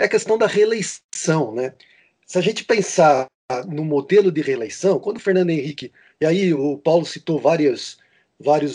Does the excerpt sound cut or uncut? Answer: uncut